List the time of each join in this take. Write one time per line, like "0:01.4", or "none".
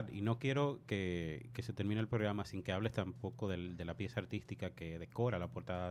none